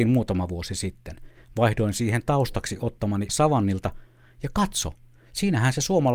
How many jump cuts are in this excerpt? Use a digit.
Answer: 1